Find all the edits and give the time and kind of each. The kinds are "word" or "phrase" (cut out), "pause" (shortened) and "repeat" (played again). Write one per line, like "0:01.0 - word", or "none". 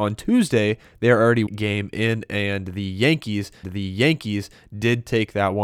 0:01.5 - word
0:03.6 - repeat